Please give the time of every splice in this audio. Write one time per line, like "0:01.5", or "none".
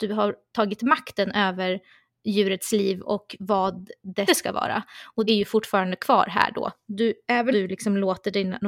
0:04.3
0:05.3
0:07.5